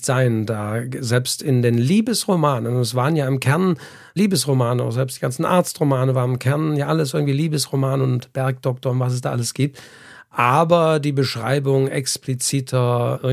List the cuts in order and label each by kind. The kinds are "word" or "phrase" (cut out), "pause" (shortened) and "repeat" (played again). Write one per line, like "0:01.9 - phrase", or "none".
none